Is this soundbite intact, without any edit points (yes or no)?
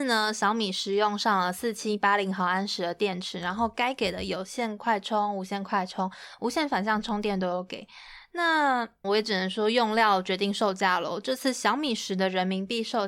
no